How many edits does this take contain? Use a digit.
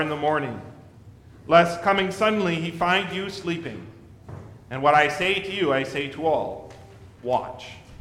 0